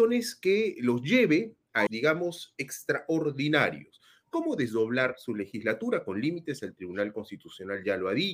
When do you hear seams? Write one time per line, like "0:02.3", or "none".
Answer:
0:01.9